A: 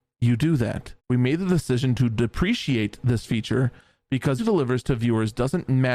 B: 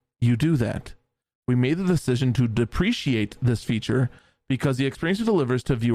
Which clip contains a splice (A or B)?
A